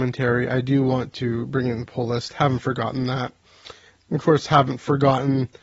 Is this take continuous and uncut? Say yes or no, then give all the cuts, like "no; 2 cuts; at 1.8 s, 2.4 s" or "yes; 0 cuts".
yes; 0 cuts